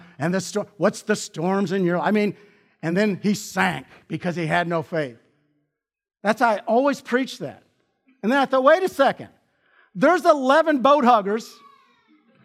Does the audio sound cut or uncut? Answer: uncut